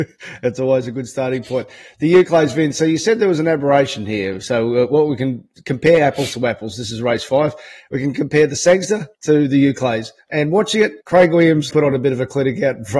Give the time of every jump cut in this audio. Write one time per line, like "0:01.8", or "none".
0:09.1
0:11.0
0:11.7